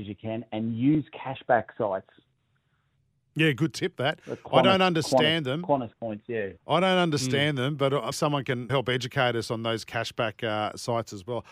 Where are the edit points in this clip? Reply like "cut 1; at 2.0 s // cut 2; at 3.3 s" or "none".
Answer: cut 1; at 8.1 s // cut 2; at 8.7 s